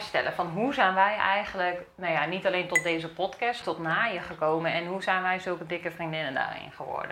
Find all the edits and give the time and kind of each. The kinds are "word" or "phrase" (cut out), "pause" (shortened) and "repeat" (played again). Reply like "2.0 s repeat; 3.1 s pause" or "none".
3.6 s phrase